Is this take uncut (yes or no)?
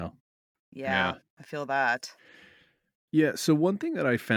yes